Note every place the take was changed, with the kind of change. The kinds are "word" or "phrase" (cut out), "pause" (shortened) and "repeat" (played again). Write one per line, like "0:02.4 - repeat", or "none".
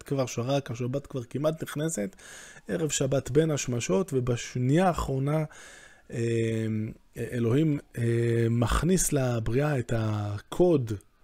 none

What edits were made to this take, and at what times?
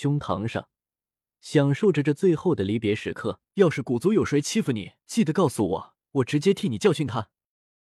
0:03.4 - pause
0:05.0 - pause
0:06.0 - pause

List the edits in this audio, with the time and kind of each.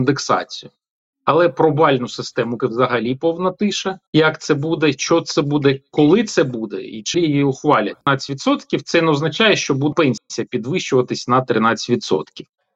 0:02.6 - word
0:04.1 - pause
0:07.1 - word
0:08.0 - pause
0:09.9 - word

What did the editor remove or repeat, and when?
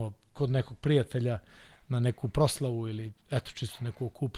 none

